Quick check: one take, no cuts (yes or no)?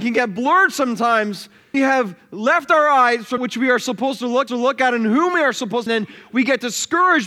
no